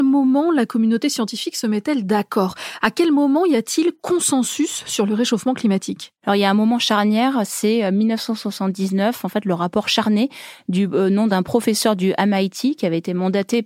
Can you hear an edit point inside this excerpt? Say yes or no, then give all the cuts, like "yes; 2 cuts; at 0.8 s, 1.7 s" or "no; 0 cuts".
yes; 1 cut; at 6.2 s